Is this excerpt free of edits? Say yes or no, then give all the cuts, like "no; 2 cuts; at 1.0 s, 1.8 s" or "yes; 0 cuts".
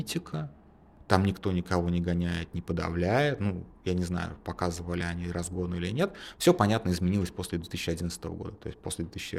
yes; 0 cuts